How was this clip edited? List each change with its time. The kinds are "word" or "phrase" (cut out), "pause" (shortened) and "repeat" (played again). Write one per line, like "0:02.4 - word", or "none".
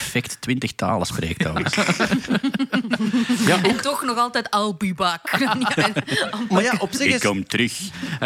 none